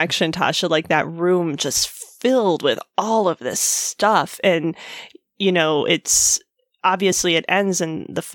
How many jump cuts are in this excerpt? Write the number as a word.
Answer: zero